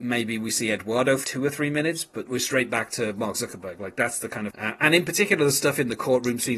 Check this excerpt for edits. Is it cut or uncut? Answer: cut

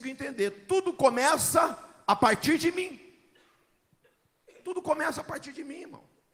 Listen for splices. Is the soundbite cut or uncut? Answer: uncut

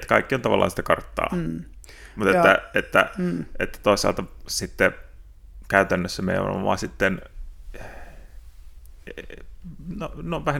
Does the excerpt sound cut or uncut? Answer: uncut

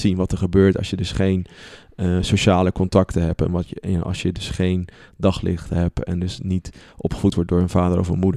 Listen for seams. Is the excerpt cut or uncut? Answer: uncut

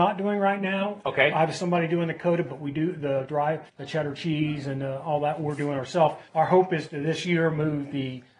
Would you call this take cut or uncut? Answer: cut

